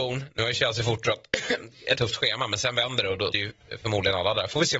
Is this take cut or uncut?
cut